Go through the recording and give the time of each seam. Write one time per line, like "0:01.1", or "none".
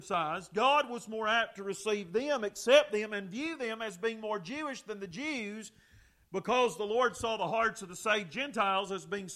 none